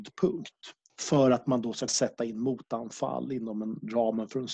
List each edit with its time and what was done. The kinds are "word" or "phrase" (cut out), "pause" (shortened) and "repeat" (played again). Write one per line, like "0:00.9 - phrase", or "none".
0:01.9 - word